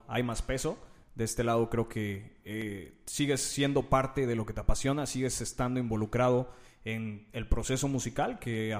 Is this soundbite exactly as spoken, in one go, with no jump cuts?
yes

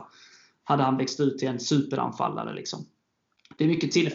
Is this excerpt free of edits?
yes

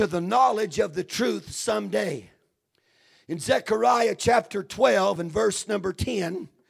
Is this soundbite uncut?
yes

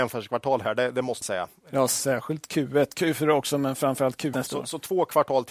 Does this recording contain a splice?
yes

